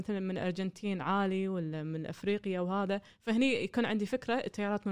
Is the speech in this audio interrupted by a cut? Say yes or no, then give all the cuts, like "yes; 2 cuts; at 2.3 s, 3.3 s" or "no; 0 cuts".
no; 0 cuts